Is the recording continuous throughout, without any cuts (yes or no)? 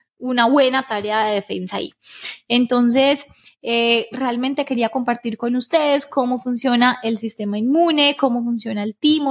yes